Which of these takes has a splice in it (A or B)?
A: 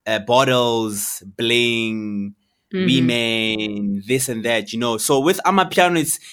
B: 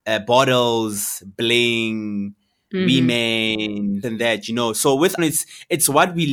B